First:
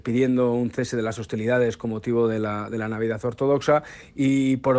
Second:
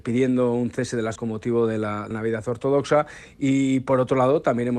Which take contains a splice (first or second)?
second